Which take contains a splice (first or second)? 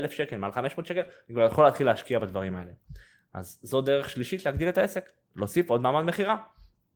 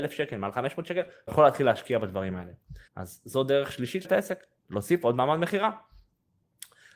second